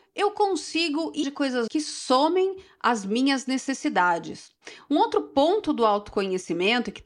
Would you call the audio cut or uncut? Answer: cut